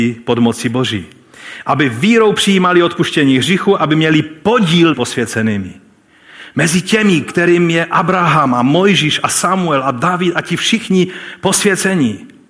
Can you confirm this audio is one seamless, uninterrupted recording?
no; 1 cut; at 4.9 s

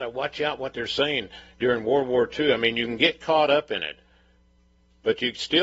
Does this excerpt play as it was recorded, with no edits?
yes; 0 cuts

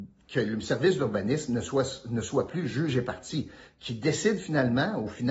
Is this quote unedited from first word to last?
yes; 0 cuts

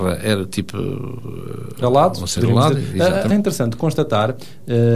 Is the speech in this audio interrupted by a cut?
yes; 2 cuts; at 1.8 s, 3.3 s

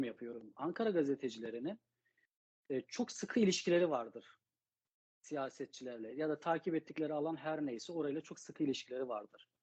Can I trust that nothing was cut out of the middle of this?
yes; 0 cuts

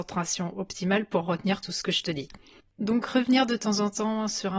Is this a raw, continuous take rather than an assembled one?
yes; 0 cuts

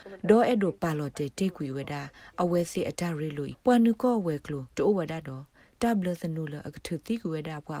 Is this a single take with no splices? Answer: no; 2 cuts; at 3.5 s, 4.7 s

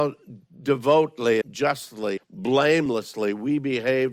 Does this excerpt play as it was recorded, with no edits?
no; 2 cuts; at 1.4 s, 2.2 s

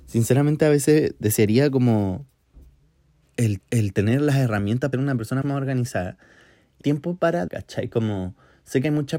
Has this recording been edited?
yes; 5 cuts; at 3.6 s, 4.9 s, 5.4 s, 6.8 s, 7.5 s

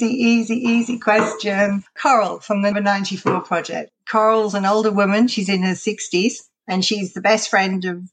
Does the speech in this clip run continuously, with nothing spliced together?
no; 1 cut; at 2.7 s

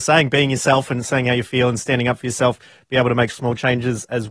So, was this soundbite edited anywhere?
no; 0 cuts

